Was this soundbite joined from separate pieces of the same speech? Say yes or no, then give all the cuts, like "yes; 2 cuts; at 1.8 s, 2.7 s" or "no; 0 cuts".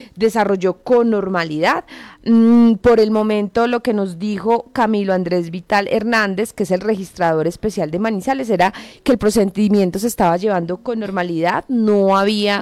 no; 0 cuts